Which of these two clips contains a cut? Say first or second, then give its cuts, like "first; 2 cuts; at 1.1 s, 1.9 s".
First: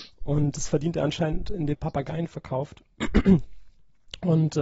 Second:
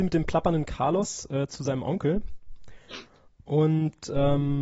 first; 1 cut; at 1.7 s